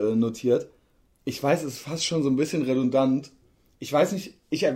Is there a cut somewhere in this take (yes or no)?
no